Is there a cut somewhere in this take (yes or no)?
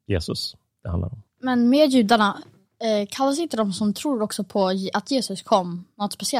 no